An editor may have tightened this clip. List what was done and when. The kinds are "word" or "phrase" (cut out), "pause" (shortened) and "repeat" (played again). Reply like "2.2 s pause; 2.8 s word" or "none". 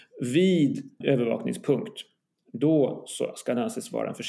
1.0 s word